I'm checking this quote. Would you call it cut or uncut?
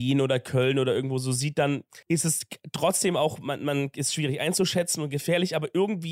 cut